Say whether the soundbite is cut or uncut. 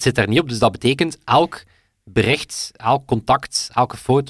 uncut